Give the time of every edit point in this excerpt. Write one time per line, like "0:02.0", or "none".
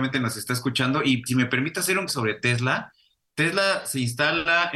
0:01.3
0:02.1